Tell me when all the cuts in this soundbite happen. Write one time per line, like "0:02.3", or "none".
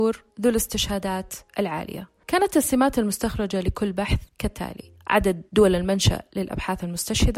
0:04.3